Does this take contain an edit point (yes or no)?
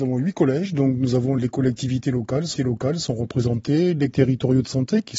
yes